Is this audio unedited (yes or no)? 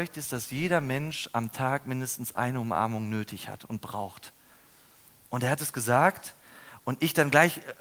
yes